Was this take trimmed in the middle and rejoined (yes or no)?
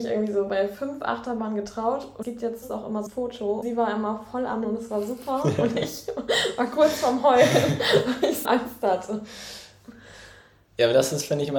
yes